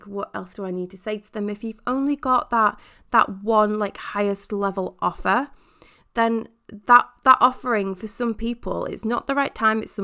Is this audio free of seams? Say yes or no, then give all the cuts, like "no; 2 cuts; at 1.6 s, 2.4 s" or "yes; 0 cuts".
yes; 0 cuts